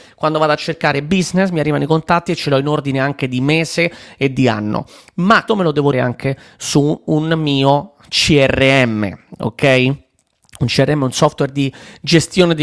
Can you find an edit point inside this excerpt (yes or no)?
yes